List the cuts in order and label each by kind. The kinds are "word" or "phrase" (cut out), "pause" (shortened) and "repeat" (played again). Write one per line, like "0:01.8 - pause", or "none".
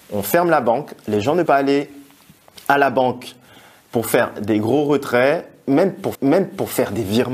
0:01.5 - word
0:06.1 - repeat

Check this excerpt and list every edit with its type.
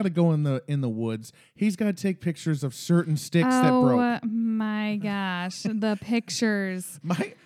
none

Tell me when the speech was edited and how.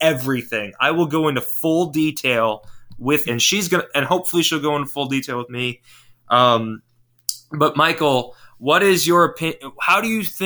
0:03.2 - word

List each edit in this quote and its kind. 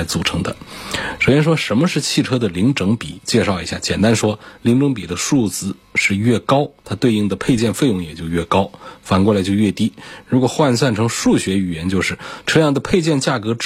0:05.8 - pause
0:06.8 - pause

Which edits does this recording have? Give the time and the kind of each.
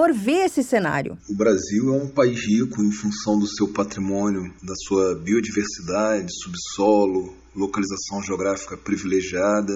0:04.6 - pause

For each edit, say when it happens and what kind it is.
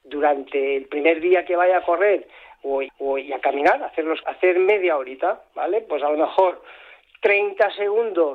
0:02.9 - repeat
0:04.2 - word

